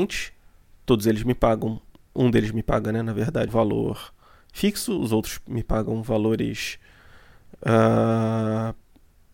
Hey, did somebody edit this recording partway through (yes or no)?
yes